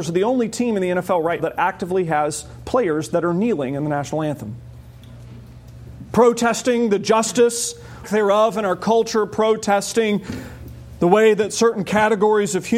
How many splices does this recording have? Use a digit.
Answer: 2